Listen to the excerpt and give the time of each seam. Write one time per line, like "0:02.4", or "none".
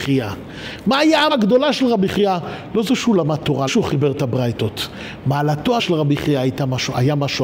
0:01.3
0:03.7
0:05.8

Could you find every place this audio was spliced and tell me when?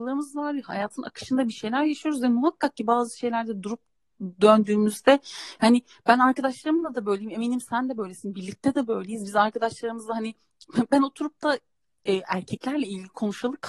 none

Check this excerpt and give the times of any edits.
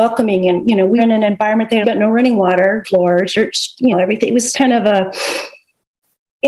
0:01.0
0:01.8
0:02.8
0:03.9
0:04.5

